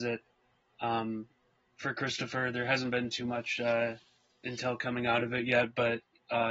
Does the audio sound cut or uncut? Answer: uncut